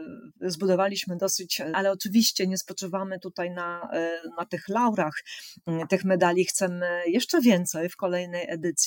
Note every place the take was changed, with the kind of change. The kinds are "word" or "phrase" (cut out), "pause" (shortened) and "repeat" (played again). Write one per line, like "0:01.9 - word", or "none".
0:01.7 - word